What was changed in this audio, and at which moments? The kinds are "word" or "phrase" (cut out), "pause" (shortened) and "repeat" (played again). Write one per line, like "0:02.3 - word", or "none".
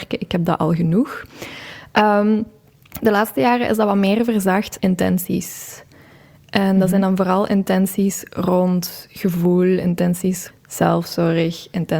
0:04.8 - word
0:10.5 - word